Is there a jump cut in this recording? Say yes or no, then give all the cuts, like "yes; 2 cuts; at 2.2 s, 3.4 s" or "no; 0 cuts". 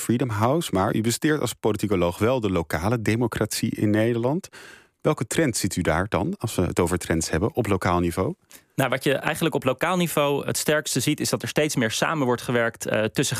no; 0 cuts